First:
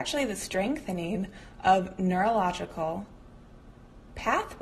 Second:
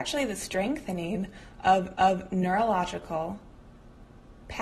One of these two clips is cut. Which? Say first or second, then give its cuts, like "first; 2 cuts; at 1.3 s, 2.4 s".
second; 1 cut; at 2.0 s